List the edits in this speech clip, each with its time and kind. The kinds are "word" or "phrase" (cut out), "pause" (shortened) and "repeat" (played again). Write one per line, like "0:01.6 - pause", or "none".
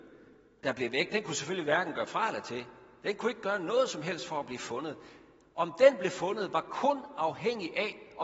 none